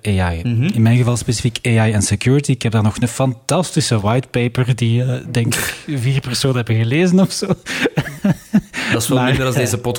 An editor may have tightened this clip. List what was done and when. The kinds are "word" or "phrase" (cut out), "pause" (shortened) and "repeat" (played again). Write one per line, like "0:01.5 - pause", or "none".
none

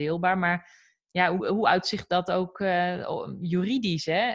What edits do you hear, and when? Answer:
0:01.4 - word

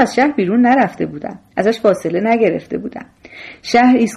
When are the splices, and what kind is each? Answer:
none

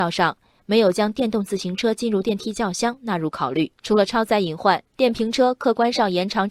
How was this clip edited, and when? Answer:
0:03.8 - pause
0:04.8 - pause

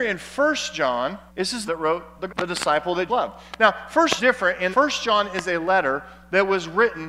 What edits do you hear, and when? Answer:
0:01.3 - pause
0:01.7 - phrase
0:02.3 - phrase
0:03.1 - word
0:04.2 - word
0:04.7 - word

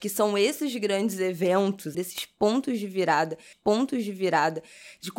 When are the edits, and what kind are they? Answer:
0:01.9 - word
0:03.5 - repeat

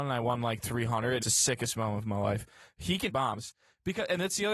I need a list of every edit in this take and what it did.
0:01.2 - word
0:03.1 - word

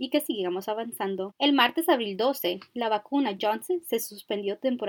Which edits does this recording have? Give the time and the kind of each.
0:03.4 - word

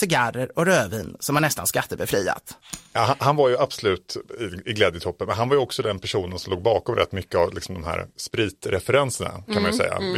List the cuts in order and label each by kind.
0:02.9 - pause

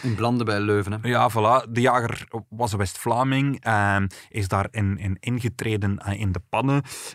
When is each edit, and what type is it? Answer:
none

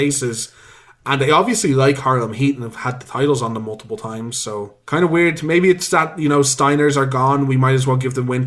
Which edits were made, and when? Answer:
none

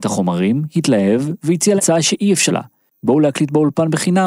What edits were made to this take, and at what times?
0:01.8 - word
0:02.5 - word

